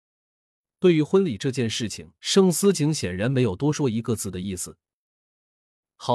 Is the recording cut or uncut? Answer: cut